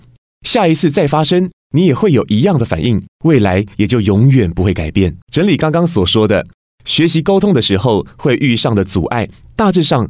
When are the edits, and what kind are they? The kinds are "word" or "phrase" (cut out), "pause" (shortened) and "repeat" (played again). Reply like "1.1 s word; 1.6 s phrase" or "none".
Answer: 3.1 s pause; 5.2 s pause